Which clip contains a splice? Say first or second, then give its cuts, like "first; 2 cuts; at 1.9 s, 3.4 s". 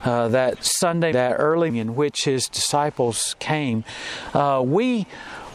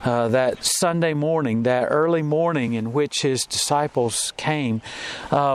first; 2 cuts; at 1.1 s, 1.7 s